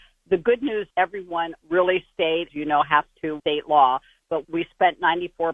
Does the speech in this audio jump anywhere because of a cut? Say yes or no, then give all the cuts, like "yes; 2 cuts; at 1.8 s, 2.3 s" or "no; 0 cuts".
yes; 5 cuts; at 0.9 s, 1.6 s, 2.5 s, 3.4 s, 4.4 s